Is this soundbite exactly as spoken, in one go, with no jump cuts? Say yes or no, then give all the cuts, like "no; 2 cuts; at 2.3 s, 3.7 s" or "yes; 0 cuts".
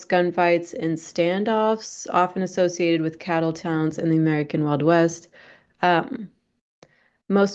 yes; 0 cuts